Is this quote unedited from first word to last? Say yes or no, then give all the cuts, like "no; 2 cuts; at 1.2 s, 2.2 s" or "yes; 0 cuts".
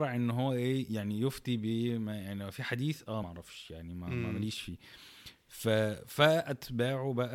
no; 1 cut; at 3.2 s